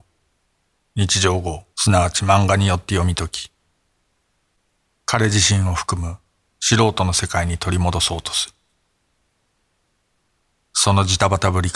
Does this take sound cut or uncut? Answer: cut